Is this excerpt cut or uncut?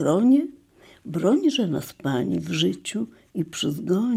uncut